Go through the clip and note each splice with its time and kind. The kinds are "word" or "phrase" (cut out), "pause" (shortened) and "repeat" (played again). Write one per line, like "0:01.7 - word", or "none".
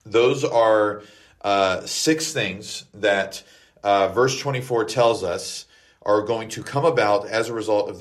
none